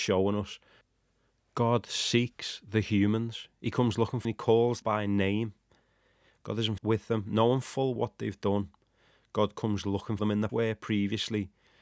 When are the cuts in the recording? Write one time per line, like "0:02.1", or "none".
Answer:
0:04.2
0:04.8
0:06.8
0:08.0
0:10.2
0:10.5